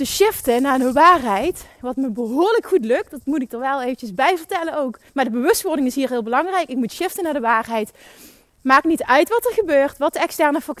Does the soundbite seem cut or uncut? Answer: cut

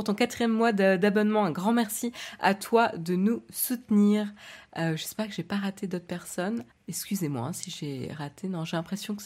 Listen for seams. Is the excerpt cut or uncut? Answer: cut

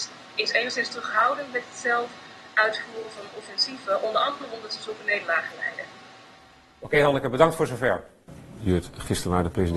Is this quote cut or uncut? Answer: uncut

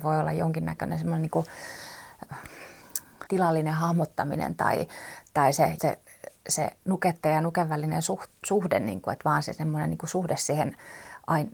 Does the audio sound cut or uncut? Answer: cut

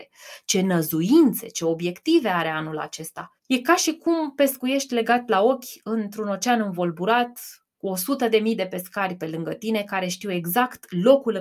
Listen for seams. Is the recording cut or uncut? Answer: cut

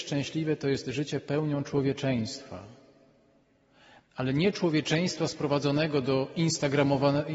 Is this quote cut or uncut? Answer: uncut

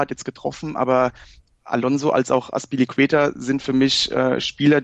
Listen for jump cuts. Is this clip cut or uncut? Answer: uncut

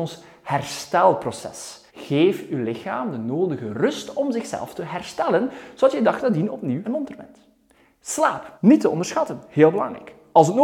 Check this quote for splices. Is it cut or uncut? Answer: cut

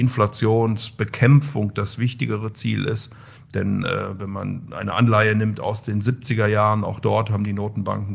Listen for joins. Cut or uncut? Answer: uncut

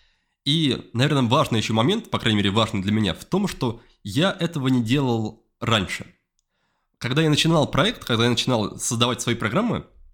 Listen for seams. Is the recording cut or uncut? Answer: uncut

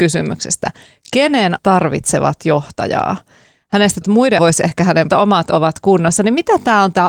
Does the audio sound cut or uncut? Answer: cut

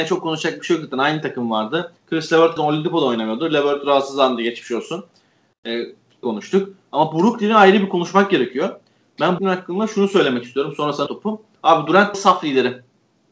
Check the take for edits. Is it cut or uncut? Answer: cut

